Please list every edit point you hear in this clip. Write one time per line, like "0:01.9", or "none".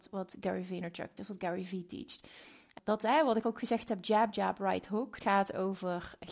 0:01.2
0:02.8
0:03.4
0:04.3
0:05.2